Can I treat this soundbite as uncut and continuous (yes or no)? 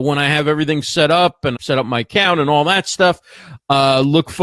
no